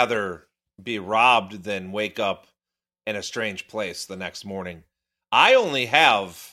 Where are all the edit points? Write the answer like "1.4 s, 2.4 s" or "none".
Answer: none